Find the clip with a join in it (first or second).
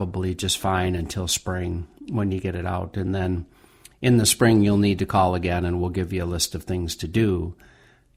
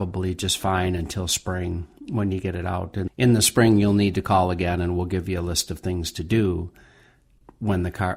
second